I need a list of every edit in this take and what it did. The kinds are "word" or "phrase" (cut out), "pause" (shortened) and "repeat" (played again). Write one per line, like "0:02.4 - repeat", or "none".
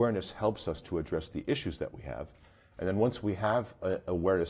none